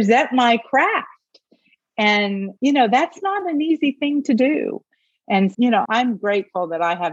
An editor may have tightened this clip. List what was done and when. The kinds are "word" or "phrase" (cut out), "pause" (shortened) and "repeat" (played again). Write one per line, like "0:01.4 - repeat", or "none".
0:02.6 - pause
0:05.5 - word
0:05.9 - word